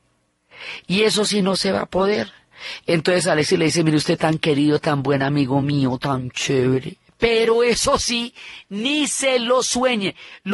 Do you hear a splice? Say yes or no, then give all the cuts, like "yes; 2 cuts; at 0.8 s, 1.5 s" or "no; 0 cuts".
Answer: no; 0 cuts